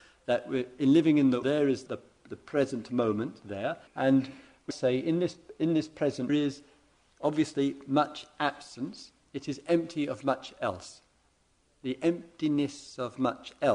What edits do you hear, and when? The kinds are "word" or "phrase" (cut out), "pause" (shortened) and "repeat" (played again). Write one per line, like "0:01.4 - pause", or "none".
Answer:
0:01.4 - word
0:01.9 - word
0:03.9 - pause
0:04.7 - word
0:06.3 - phrase